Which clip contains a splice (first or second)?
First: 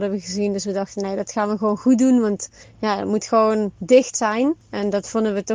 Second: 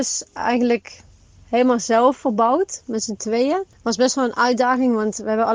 first